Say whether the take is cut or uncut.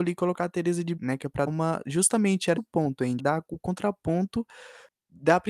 cut